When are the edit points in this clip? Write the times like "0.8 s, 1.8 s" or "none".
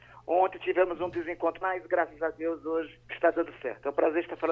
1.6 s, 3.0 s